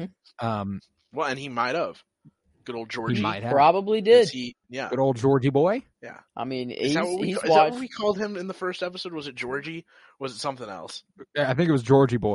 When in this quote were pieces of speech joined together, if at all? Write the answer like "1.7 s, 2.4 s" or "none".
6.3 s

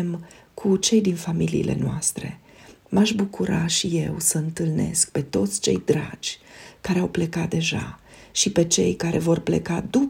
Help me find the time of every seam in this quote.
none

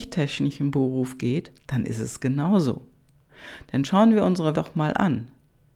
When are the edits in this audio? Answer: 1.6 s, 4.5 s

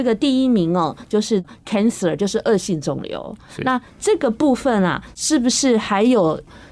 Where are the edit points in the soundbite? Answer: none

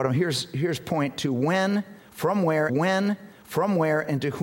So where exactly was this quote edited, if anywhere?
2.7 s

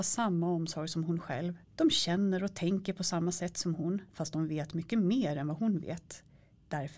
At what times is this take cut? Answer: 1.7 s, 4.1 s

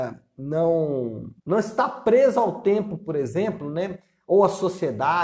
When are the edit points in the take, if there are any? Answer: 1.4 s

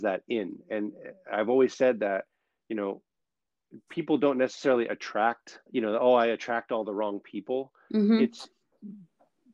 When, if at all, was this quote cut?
5.7 s

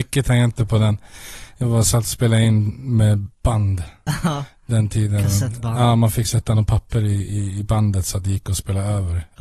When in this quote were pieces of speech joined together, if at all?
3.3 s

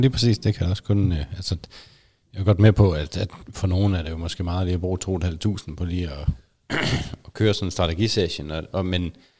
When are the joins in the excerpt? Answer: none

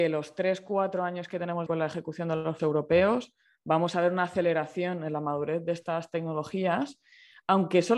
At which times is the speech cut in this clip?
1.7 s, 2.6 s

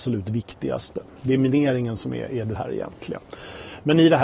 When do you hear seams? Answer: 2.6 s

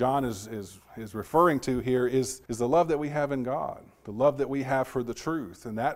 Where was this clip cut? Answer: 2.5 s

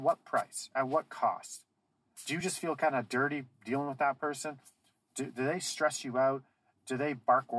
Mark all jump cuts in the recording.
none

